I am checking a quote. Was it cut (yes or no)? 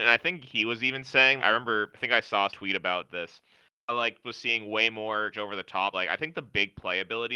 yes